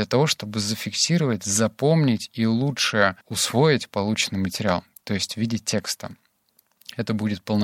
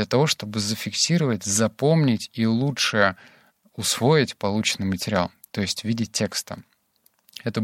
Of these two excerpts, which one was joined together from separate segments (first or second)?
first